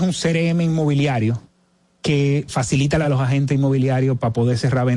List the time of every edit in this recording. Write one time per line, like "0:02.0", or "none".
0:02.5
0:03.0